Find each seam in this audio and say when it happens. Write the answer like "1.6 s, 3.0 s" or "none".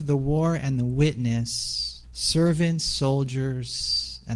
2.0 s